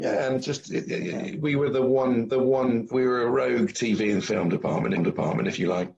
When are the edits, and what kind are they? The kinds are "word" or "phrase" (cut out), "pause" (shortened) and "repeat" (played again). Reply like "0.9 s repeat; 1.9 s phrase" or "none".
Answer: 2.3 s repeat; 5.0 s repeat